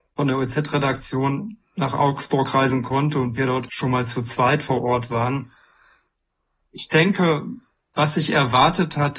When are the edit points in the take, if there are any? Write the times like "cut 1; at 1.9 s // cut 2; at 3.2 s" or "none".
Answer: none